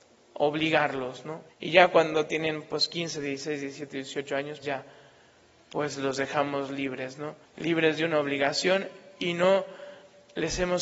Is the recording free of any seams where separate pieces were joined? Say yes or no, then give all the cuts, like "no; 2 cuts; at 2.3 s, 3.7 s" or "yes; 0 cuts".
no; 3 cuts; at 1.5 s, 4.6 s, 7.4 s